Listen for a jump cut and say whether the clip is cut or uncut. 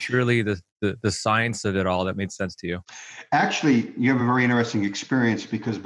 uncut